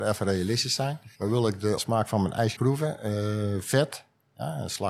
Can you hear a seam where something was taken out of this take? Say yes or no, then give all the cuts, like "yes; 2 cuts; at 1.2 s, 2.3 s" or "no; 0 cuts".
yes; 3 cuts; at 1.1 s, 1.8 s, 2.6 s